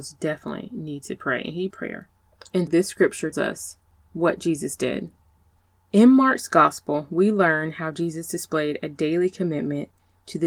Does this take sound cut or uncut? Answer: cut